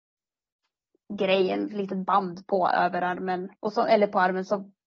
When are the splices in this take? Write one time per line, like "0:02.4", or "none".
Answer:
0:03.5